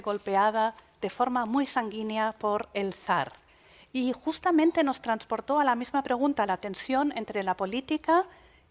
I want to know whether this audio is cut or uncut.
uncut